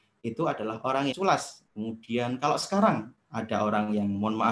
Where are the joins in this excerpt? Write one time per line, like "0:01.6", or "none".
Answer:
0:01.1
0:01.7
0:03.2